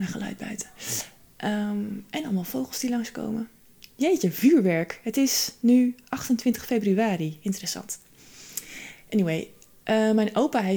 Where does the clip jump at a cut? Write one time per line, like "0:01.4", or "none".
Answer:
none